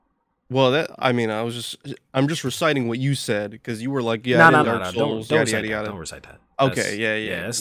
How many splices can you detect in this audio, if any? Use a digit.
1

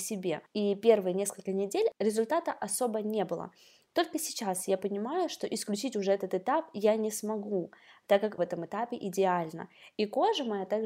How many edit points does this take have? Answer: 1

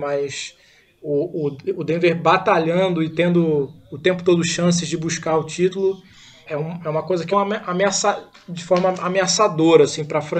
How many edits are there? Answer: 2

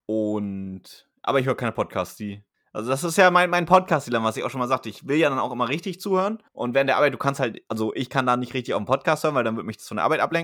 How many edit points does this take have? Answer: 2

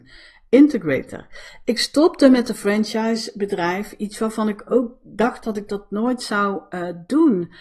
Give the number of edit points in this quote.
0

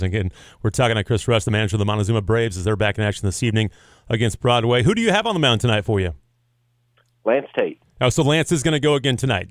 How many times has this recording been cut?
0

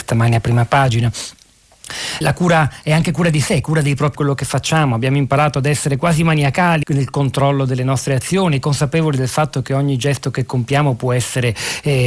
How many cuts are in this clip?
3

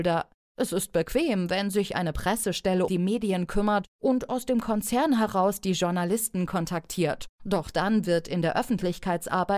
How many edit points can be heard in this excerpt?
1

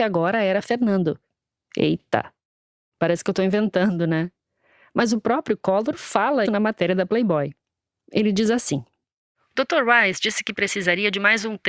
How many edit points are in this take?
1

